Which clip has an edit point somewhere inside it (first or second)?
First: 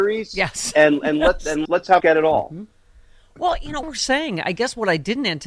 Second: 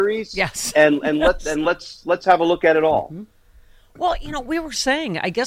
first